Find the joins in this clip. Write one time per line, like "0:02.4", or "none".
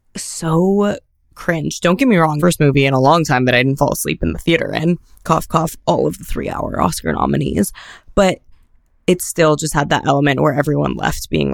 0:02.4